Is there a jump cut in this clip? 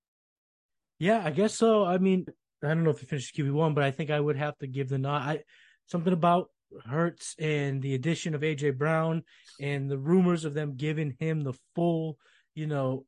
yes; 1 cut; at 2.3 s

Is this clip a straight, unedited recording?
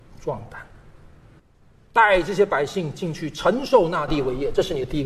yes; 0 cuts

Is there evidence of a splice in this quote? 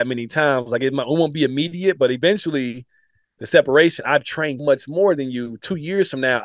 yes; 1 cut; at 4.6 s

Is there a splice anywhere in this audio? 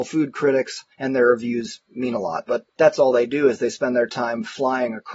yes; 2 cuts; at 0.9 s, 2.7 s

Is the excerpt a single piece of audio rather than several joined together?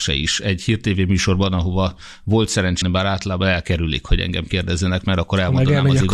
no; 1 cut; at 2.8 s

